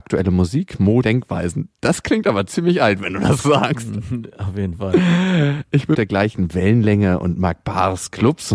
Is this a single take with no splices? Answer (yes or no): no